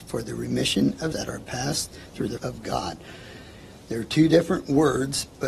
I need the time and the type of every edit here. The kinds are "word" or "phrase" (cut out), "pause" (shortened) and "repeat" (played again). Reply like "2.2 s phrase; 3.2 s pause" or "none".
1.1 s word; 2.4 s word